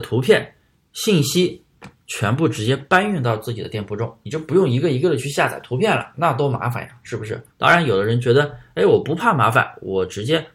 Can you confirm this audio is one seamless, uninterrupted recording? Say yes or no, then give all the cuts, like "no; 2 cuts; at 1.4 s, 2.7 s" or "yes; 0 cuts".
no; 1 cut; at 7.5 s